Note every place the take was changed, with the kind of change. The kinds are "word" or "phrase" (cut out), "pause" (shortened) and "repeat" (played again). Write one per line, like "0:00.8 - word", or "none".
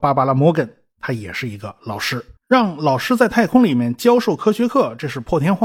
0:02.4 - pause

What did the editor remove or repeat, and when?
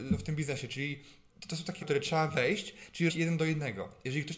0:01.8 - word
0:03.1 - word

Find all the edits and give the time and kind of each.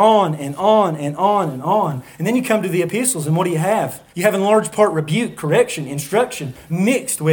0:04.1 - pause

